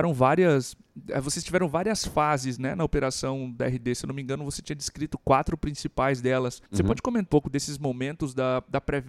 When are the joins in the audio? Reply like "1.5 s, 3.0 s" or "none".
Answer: 6.7 s, 7.3 s